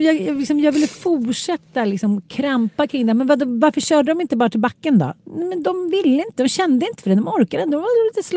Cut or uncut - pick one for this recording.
cut